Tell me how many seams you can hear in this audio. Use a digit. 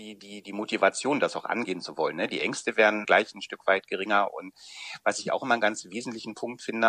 0